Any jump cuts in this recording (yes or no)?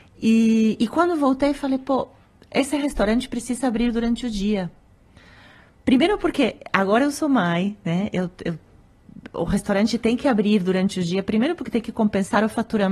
no